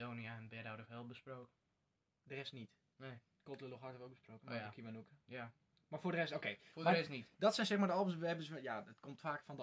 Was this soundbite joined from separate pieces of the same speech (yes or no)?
no